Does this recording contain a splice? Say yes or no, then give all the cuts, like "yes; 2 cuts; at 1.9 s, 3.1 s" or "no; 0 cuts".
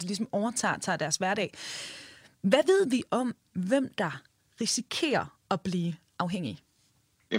no; 0 cuts